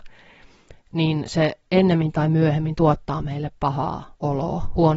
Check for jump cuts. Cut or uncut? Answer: uncut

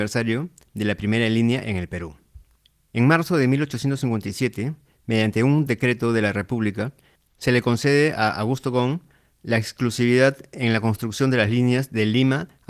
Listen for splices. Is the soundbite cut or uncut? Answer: uncut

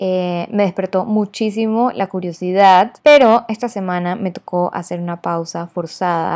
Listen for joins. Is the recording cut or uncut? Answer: cut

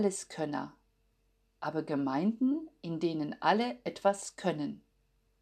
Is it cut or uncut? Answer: uncut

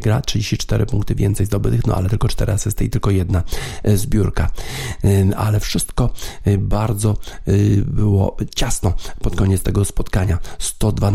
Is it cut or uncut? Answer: uncut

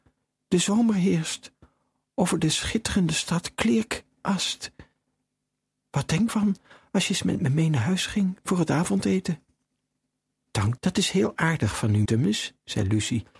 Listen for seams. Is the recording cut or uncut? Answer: cut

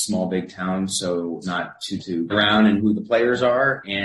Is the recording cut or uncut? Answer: cut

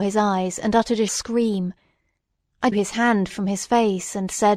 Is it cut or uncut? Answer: cut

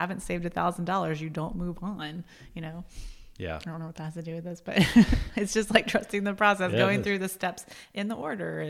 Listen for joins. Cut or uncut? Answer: uncut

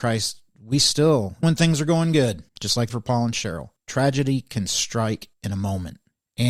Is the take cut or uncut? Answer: cut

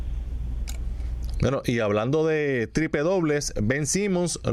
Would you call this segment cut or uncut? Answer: uncut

